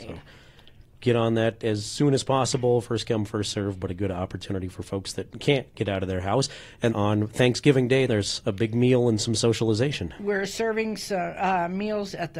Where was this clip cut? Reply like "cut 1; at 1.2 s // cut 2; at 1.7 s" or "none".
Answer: cut 1; at 6.9 s // cut 2; at 8.1 s